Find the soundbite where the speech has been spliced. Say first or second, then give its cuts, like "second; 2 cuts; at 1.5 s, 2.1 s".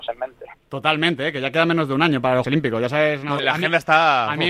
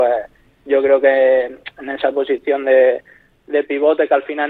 first; 2 cuts; at 2.4 s, 3.4 s